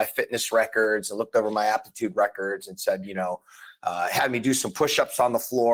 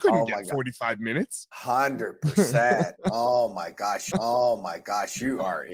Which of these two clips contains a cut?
second; 2 cuts; at 1.5 s, 4.1 s

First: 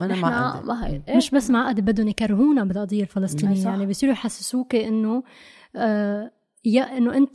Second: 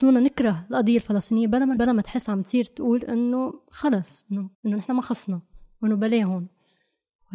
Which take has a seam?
second; 2 cuts; at 1.8 s, 4.5 s

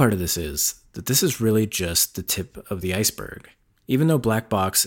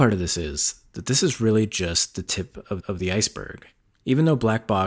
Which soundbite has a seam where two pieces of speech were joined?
second; 1 cut; at 2.8 s

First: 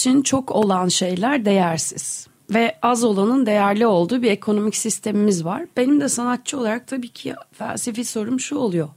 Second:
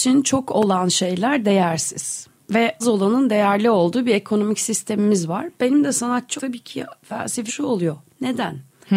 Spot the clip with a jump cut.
second; 3 cuts; at 2.8 s, 6.4 s, 7.5 s

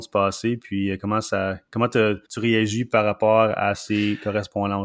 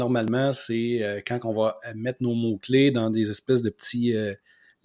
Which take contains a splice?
first; 1 cut; at 2.3 s

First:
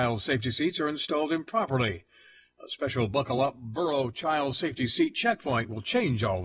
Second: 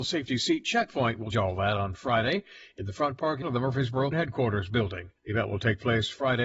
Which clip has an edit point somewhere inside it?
second; 4 cuts; at 1.3 s, 3.4 s, 4.1 s, 5.2 s

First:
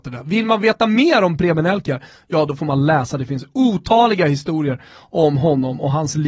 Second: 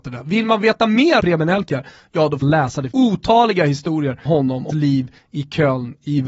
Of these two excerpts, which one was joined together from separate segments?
second; 5 cuts; at 1.2 s, 2.4 s, 2.9 s, 4.3 s, 4.7 s

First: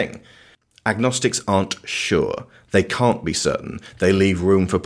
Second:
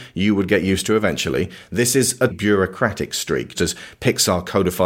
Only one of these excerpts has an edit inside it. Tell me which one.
second; 2 cuts; at 2.3 s, 3.6 s

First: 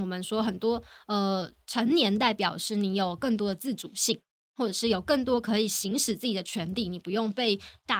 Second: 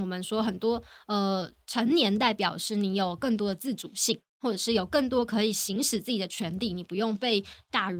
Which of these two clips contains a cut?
second; 1 cut; at 4.3 s

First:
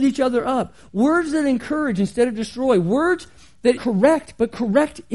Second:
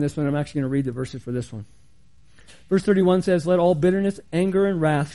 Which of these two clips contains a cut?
first; 1 cut; at 3.8 s

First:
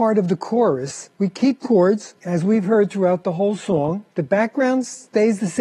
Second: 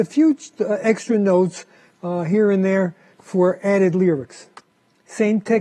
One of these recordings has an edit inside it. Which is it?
first; 4 cuts; at 1.1 s, 1.6 s, 2.2 s, 4.1 s

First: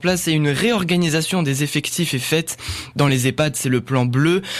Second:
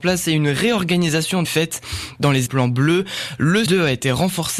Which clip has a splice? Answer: second; 3 cuts; at 1.4 s, 2.5 s, 3.7 s

